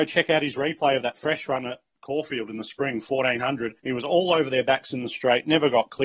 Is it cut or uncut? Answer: cut